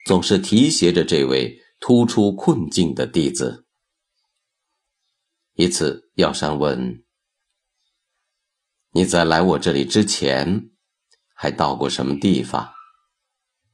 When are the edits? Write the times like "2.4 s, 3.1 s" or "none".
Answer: none

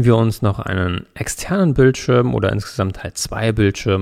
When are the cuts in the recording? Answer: none

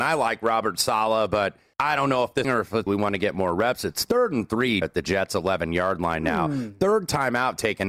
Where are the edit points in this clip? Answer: 1.7 s, 2.4 s, 2.9 s, 4.8 s

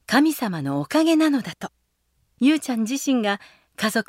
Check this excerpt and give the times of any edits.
2.1 s

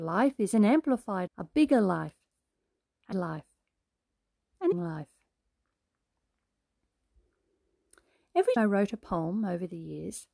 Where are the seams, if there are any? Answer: 1.3 s, 3.1 s, 4.7 s, 8.6 s

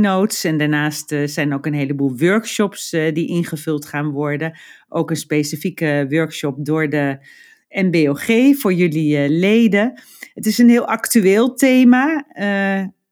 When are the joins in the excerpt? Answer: none

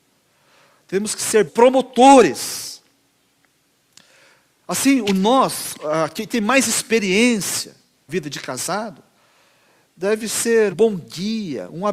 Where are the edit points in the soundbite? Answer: 1.5 s, 6.3 s, 8.1 s, 10.7 s

